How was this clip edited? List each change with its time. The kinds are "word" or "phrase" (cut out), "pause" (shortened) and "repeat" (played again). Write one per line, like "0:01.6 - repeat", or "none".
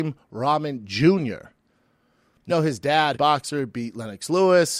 0:02.5 - word
0:03.1 - phrase